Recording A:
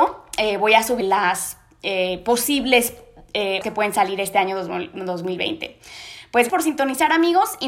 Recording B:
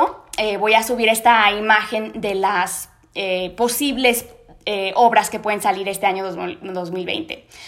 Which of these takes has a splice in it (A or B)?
A